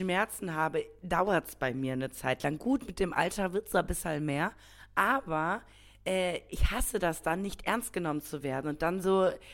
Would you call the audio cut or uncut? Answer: uncut